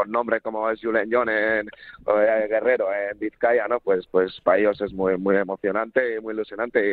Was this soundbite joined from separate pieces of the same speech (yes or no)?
no